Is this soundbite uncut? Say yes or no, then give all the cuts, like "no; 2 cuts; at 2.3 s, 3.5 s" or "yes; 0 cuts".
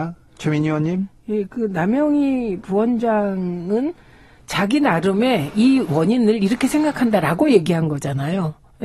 yes; 0 cuts